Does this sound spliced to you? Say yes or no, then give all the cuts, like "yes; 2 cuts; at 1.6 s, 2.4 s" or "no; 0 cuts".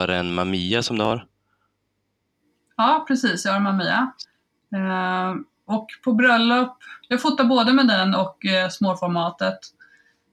no; 0 cuts